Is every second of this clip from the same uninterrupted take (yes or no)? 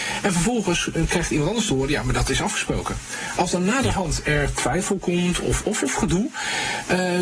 yes